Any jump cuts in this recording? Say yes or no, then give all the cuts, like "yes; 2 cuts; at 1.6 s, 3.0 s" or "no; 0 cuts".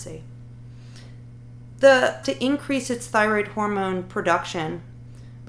yes; 1 cut; at 2.2 s